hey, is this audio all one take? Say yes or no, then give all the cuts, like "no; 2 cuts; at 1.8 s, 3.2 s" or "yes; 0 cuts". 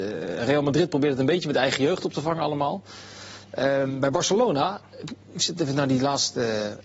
yes; 0 cuts